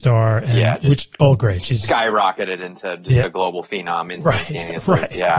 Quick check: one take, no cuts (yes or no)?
yes